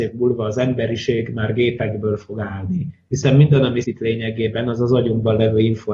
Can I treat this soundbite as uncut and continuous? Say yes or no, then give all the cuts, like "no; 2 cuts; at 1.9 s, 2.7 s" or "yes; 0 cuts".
no; 1 cut; at 3.8 s